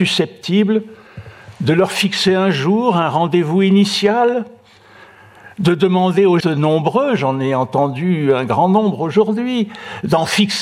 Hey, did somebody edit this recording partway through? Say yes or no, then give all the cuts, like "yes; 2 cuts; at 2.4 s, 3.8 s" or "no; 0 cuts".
yes; 1 cut; at 6.4 s